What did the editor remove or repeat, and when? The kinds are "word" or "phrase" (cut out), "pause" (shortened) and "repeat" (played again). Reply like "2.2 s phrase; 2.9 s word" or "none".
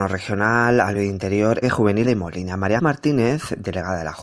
0.9 s word; 1.6 s phrase; 2.0 s word; 2.8 s word